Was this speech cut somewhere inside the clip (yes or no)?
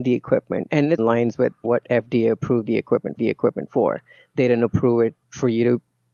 yes